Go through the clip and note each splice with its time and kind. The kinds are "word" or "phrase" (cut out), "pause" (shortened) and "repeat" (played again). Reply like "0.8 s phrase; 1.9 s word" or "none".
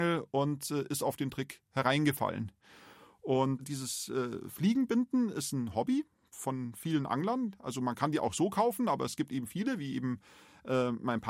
none